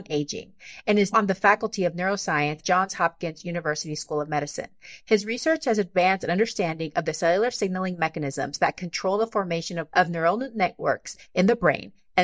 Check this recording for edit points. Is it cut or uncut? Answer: cut